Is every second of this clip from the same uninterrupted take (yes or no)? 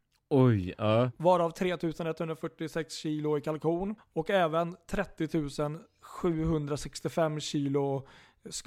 no